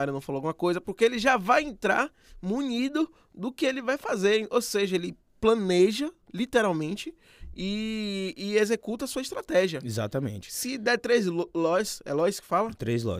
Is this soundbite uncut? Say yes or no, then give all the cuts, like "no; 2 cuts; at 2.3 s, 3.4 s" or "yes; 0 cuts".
yes; 0 cuts